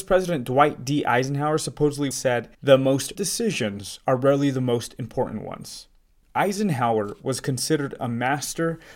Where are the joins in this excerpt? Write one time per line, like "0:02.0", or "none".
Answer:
0:02.1
0:02.5
0:03.1